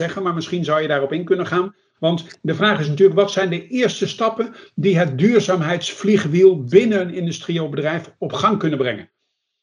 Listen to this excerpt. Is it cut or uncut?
uncut